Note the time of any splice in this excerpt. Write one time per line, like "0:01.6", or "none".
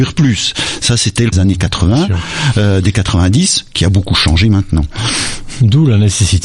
0:01.3